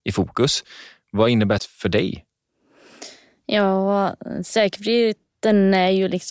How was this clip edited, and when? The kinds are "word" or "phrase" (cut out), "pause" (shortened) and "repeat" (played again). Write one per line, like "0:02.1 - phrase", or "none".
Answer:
0:01.6 - word